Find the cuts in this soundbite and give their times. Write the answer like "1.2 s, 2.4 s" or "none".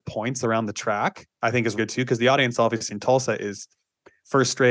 1.3 s, 1.8 s